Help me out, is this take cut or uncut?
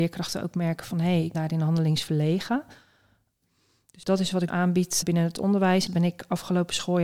cut